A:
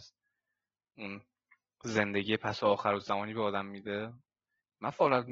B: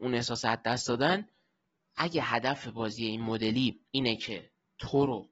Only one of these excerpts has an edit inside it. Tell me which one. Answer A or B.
B